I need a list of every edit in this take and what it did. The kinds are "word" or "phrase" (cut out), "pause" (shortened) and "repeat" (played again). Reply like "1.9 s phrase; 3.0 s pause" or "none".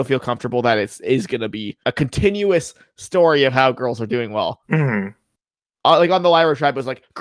1.8 s pause; 4.6 s pause